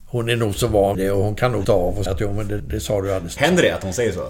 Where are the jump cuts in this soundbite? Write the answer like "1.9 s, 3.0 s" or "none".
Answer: 0.9 s, 1.6 s, 2.1 s, 2.6 s, 3.4 s